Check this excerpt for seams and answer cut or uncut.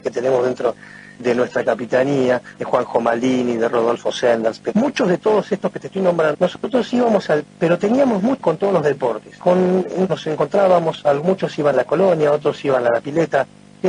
cut